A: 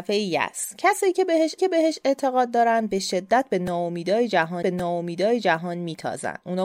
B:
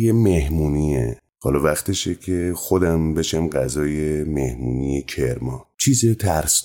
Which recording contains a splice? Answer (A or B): A